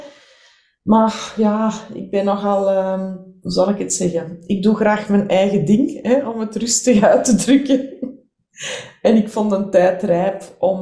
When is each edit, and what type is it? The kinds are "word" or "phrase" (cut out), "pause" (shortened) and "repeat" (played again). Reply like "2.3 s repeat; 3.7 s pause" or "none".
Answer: none